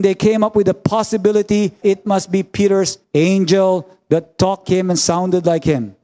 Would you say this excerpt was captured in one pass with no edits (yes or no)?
no